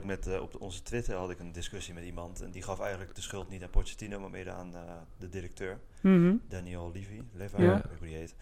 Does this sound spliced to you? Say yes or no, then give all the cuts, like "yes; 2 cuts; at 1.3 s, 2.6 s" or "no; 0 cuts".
no; 0 cuts